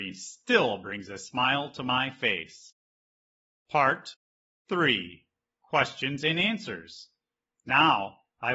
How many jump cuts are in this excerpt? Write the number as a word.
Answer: zero